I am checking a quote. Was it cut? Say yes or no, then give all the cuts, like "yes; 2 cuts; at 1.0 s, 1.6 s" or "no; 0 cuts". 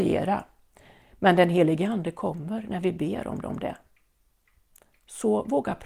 yes; 1 cut; at 3.4 s